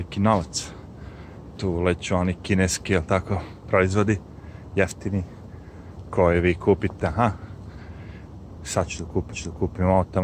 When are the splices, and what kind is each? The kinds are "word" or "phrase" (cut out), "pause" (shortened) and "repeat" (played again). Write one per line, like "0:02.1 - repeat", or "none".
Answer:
0:06.1 - word
0:07.0 - word
0:09.3 - repeat